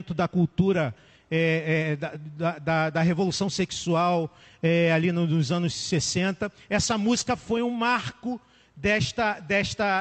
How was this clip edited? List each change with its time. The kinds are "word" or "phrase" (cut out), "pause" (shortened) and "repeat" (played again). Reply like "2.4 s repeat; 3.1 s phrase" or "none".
none